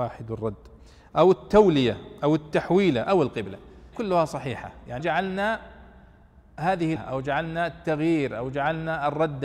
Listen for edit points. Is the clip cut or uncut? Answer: cut